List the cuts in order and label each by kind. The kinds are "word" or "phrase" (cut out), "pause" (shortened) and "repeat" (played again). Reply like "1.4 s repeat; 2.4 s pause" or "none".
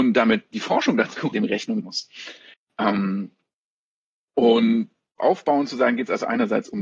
1.3 s word; 1.8 s word; 5.2 s word